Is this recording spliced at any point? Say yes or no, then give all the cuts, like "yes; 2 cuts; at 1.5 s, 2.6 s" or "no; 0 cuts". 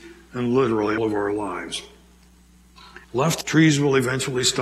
yes; 3 cuts; at 1.0 s, 3.0 s, 3.4 s